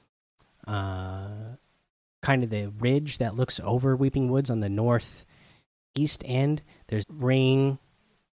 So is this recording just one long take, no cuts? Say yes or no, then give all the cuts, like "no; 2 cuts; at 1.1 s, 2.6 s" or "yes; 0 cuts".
no; 1 cut; at 7.0 s